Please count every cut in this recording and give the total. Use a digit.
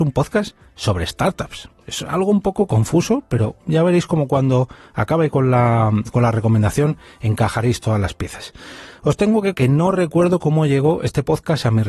1